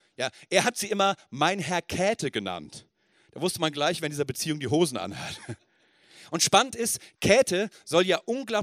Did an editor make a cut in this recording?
no; 0 cuts

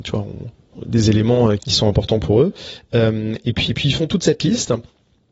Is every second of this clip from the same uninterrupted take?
no; 2 cuts; at 1.6 s, 3.7 s

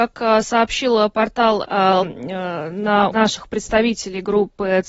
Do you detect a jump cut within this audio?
yes; 3 cuts; at 1.6 s, 2.0 s, 3.1 s

